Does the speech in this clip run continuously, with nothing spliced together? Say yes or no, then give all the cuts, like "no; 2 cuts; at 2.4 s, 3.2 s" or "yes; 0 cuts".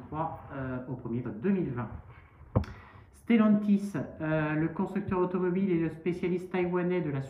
no; 1 cut; at 1.2 s